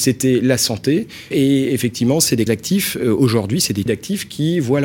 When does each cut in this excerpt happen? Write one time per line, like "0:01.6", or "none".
0:01.3
0:02.5
0:03.9